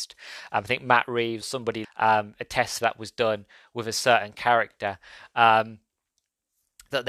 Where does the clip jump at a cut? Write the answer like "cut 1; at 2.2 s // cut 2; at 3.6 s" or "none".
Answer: cut 1; at 1.4 s // cut 2; at 1.8 s // cut 3; at 2.8 s